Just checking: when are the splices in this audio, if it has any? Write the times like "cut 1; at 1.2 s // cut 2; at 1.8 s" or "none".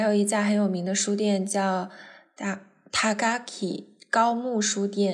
none